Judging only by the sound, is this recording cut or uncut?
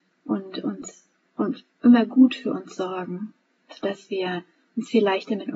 uncut